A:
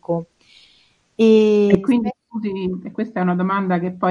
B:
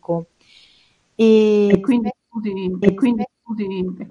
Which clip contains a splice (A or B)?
B